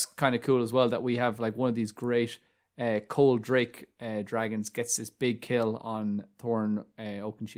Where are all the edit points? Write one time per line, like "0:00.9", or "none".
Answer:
none